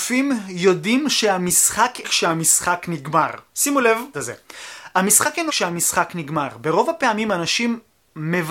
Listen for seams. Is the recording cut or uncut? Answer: cut